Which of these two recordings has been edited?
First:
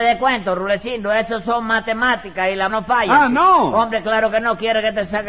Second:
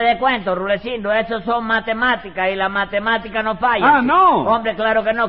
first; 1 cut; at 2.7 s

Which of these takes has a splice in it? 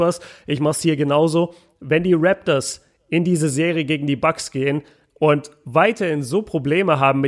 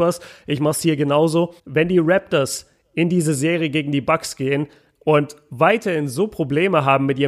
second; 1 cut; at 1.6 s

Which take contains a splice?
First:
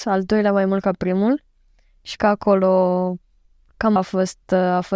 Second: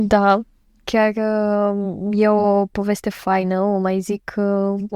first; 2 cuts; at 2.2 s, 4.0 s

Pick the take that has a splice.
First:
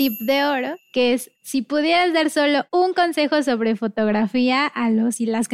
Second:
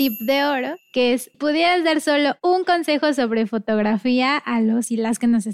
second; 1 cut; at 1.3 s

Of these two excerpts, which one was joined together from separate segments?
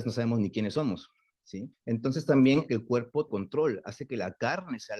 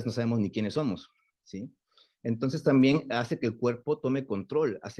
first; 3 cuts; at 1.7 s, 2.7 s, 3.3 s

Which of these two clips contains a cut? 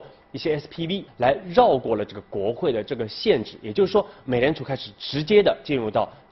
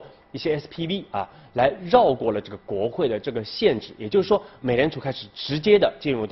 first; 1 cut; at 1.1 s

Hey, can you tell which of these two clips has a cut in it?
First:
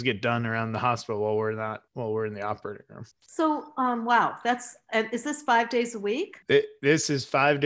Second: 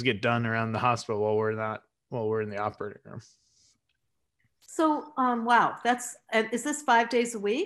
first; 3 cuts; at 1.9 s, 3.1 s, 6.4 s

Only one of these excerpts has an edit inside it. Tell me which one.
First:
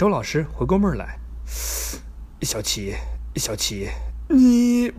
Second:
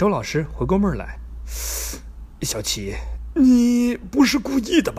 first; 1 cut; at 3.3 s

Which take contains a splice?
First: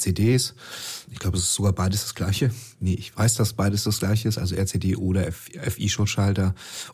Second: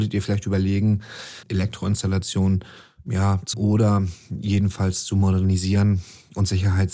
second; 2 cuts; at 1.4 s, 3.5 s

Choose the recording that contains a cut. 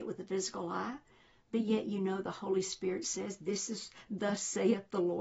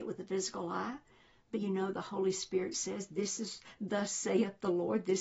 second; 1 cut; at 1.5 s

